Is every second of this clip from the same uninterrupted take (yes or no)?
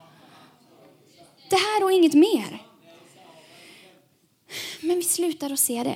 yes